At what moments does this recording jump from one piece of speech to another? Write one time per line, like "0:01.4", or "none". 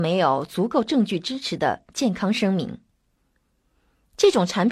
none